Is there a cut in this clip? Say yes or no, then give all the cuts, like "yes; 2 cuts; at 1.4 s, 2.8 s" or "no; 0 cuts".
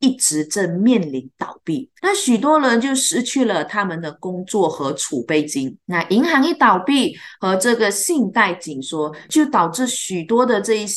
yes; 2 cuts; at 2.0 s, 5.8 s